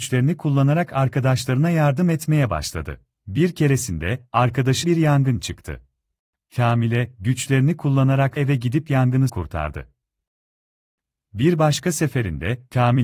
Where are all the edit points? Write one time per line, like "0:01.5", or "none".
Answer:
0:03.1
0:04.8
0:06.2
0:08.4
0:09.3